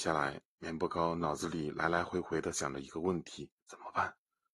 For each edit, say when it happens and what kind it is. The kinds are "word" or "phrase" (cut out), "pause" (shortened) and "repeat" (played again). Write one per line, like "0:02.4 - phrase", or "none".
0:03.6 - pause